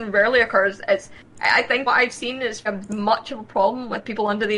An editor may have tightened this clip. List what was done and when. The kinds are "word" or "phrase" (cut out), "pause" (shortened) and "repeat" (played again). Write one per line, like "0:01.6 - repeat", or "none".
0:01.9 - phrase
0:02.7 - word